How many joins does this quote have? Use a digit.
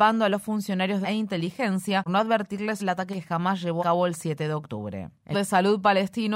6